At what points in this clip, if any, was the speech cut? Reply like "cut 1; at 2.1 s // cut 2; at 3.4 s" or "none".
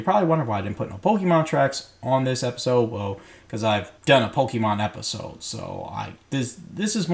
cut 1; at 4.0 s